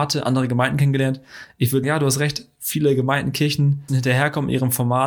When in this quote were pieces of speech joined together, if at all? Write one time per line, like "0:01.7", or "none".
0:01.8
0:03.9